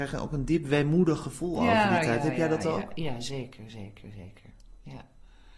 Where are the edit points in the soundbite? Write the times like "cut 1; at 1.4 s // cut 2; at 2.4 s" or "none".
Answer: none